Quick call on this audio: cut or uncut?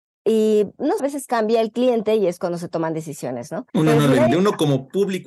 cut